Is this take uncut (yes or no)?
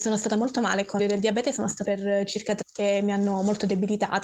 no